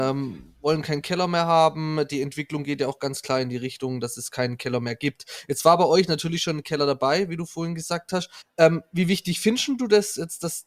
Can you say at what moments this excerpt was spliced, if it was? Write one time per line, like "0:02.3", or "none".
0:08.4